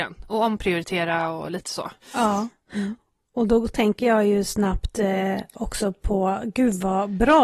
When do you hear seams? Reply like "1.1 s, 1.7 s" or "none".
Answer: 2.0 s